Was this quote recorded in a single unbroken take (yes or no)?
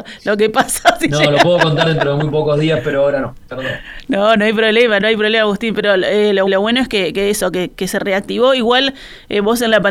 no